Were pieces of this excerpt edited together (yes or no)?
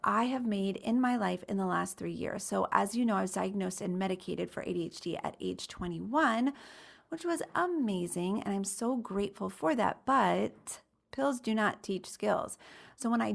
no